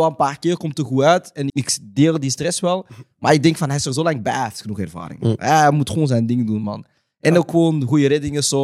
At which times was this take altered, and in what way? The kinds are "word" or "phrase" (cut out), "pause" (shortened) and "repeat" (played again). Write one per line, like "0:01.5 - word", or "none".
0:01.5 - word